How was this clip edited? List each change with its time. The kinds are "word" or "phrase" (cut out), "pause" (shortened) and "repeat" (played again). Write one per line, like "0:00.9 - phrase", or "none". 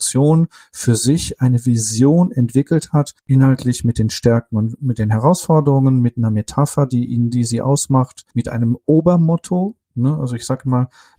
0:03.2 - pause
0:08.3 - pause